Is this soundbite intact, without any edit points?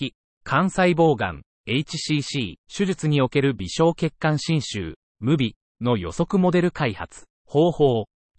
no; 2 cuts; at 2.6 s, 7.3 s

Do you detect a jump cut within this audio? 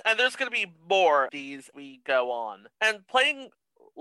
yes; 3 cuts; at 1.3 s, 1.7 s, 2.7 s

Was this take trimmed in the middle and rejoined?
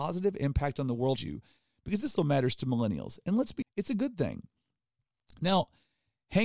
yes; 3 cuts; at 1.2 s, 2.2 s, 3.6 s

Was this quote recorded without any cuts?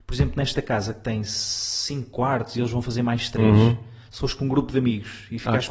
yes; 0 cuts

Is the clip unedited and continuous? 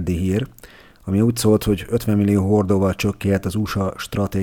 yes; 0 cuts

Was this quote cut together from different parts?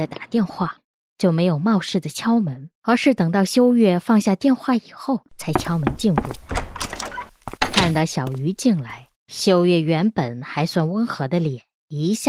yes; 4 cuts; at 2.7 s, 5.3 s, 7.6 s, 9.2 s

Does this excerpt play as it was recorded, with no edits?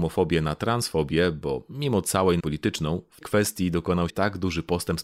no; 3 cuts; at 2.4 s, 3.2 s, 4.1 s

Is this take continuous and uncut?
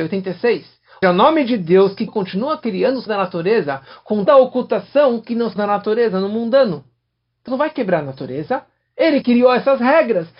no; 7 cuts; at 1.0 s, 2.1 s, 3.1 s, 4.3 s, 5.6 s, 7.5 s, 9.2 s

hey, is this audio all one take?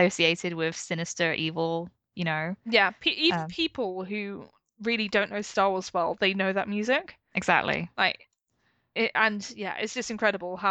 yes; 0 cuts

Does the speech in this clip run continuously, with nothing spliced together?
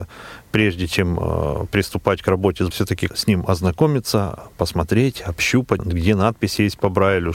no; 3 cuts; at 2.7 s, 3.1 s, 5.8 s

